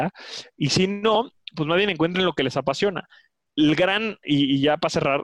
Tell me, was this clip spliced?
no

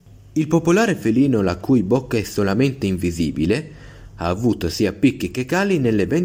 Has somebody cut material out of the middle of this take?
no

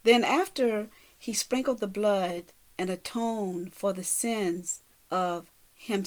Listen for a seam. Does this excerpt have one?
no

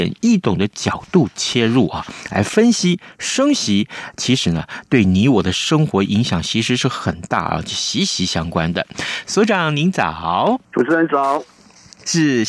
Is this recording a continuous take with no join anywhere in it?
no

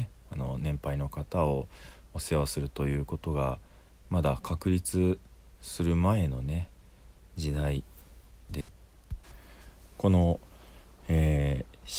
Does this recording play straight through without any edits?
yes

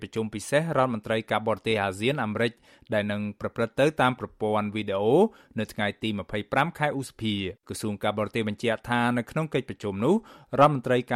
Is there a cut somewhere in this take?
yes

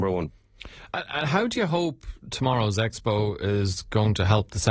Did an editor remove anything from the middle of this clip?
no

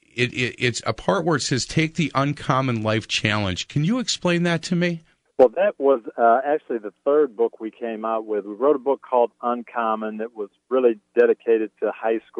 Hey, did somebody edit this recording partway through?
yes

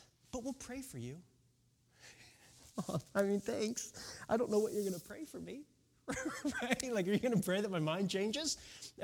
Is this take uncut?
yes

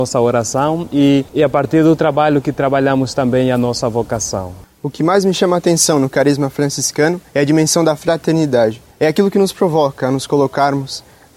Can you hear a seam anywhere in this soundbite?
yes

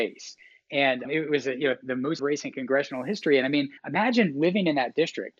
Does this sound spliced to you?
yes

